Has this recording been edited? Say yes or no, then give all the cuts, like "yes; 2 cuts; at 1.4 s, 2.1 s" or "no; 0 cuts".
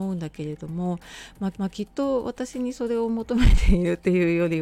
yes; 1 cut; at 1.5 s